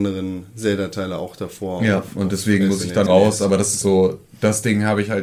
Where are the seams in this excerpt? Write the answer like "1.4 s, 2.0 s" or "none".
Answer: 3.1 s, 3.8 s